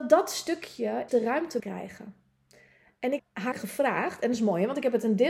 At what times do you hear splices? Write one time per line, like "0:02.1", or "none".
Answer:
0:01.1
0:01.6
0:03.2
0:03.5